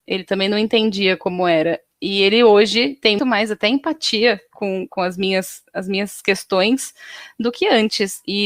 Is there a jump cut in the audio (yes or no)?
yes